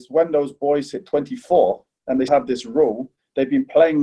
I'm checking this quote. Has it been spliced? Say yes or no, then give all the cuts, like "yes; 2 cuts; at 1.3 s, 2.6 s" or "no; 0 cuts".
yes; 1 cut; at 2.3 s